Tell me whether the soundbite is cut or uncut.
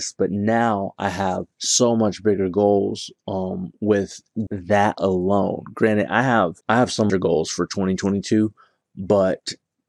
cut